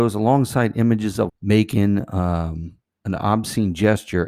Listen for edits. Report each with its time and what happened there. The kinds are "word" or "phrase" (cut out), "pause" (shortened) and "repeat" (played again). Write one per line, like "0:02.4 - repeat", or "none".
0:01.3 - phrase